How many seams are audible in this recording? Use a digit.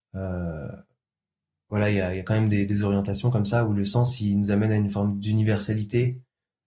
0